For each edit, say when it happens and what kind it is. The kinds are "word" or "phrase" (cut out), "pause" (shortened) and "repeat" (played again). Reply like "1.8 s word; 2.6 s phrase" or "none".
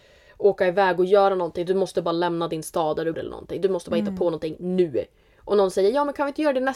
3.1 s word